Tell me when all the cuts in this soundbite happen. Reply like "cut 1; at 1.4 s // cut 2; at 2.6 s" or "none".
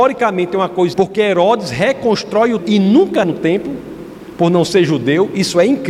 cut 1; at 0.9 s // cut 2; at 2.6 s // cut 3; at 3.2 s

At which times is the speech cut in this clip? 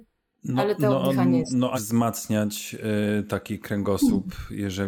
cut 1; at 1.7 s

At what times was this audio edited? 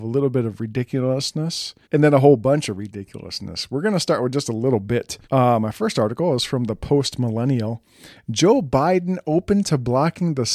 cut 1; at 1.8 s // cut 2; at 5.2 s

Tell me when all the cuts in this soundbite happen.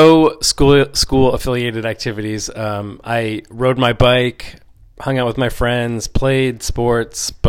none

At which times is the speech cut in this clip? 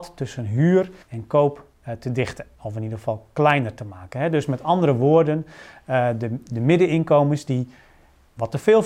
cut 1; at 1.0 s

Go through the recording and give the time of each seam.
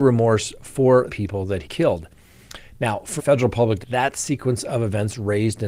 cut 1; at 1.1 s // cut 2; at 1.6 s // cut 3; at 3.2 s // cut 4; at 3.8 s

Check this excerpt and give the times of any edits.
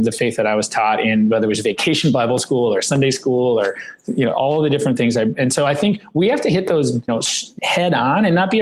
cut 1; at 7.1 s // cut 2; at 7.6 s

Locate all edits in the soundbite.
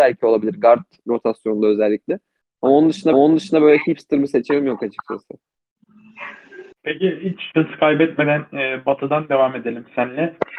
cut 1; at 3.1 s

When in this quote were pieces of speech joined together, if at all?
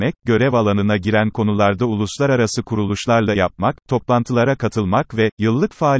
cut 1; at 3.4 s

